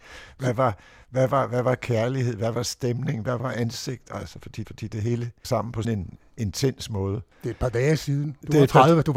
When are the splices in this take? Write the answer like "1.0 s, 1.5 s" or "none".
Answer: 4.6 s, 5.4 s, 5.8 s, 7.3 s

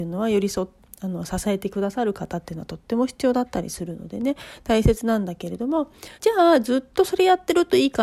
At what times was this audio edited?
6.1 s

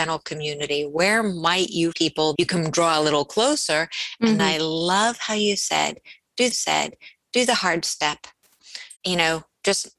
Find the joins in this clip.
1.9 s, 2.4 s, 4.4 s, 6.5 s, 9.0 s

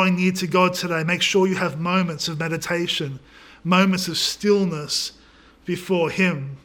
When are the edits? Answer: none

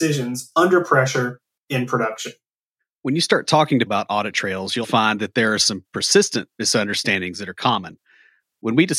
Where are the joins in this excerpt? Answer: 3.9 s, 4.8 s

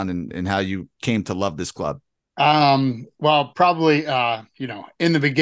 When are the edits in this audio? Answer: 2.1 s

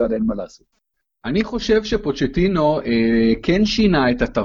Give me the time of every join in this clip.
none

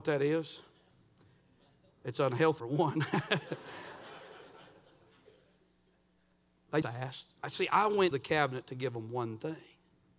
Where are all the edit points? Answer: 2.6 s, 6.8 s, 8.1 s

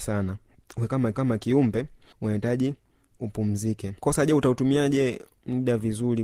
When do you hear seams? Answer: 1.1 s, 4.0 s

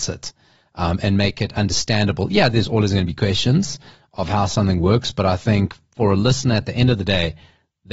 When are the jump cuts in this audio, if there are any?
none

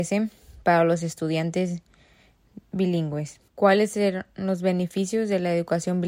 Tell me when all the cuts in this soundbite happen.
3.5 s

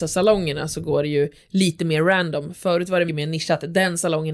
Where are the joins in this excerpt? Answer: 3.1 s

